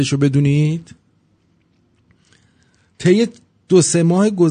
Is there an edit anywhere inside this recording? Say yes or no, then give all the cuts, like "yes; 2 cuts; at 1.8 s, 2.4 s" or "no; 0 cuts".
no; 0 cuts